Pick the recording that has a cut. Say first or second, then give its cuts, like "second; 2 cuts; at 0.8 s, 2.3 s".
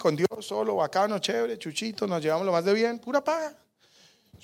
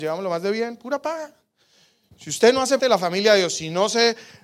second; 1 cut; at 2.8 s